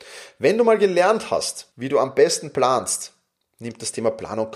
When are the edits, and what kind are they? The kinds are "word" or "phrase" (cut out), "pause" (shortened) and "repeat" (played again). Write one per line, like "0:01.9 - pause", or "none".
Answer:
0:01.7 - pause